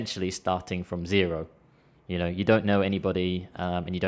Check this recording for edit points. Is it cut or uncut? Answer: uncut